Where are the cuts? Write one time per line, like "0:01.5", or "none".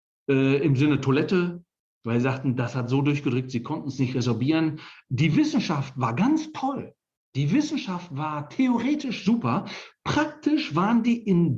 none